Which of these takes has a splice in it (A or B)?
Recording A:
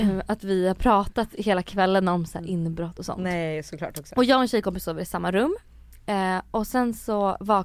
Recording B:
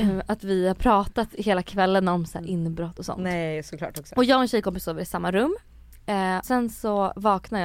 B